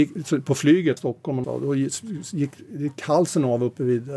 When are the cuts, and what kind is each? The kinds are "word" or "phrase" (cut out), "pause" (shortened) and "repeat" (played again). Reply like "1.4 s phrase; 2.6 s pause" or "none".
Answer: 1.0 s word; 1.4 s phrase